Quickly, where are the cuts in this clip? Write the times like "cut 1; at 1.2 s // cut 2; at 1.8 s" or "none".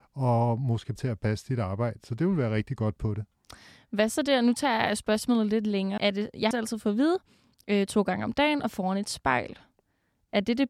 cut 1; at 1.0 s // cut 2; at 3.0 s // cut 3; at 6.0 s // cut 4; at 6.5 s